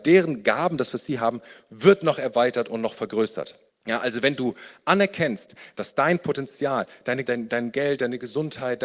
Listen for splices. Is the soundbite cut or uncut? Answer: cut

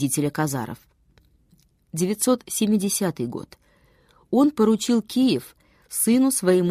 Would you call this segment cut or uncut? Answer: uncut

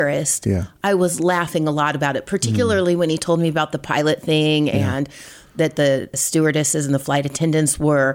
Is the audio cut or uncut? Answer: uncut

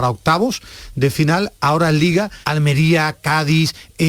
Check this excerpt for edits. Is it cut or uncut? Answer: cut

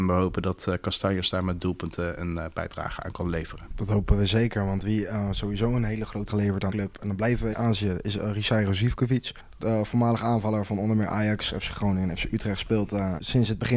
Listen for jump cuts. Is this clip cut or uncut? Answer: cut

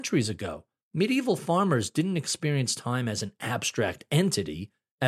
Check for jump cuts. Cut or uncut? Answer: uncut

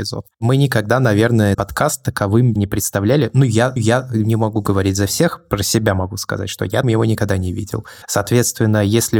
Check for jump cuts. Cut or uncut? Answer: cut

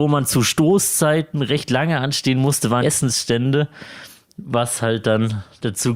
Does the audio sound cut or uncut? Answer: cut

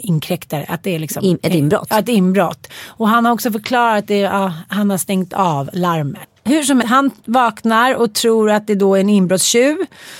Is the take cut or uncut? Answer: cut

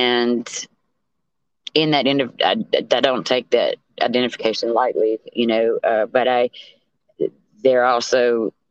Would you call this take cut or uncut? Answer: uncut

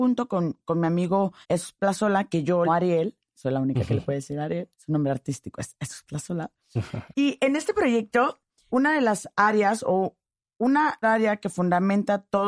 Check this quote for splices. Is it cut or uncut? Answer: cut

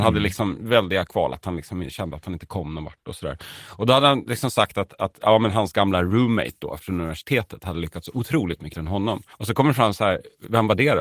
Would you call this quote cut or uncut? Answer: cut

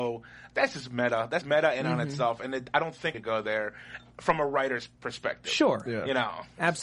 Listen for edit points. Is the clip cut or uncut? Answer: cut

